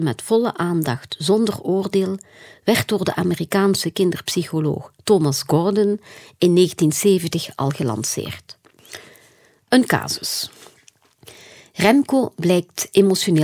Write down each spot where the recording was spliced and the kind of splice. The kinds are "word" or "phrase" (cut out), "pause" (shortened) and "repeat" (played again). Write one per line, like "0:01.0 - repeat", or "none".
none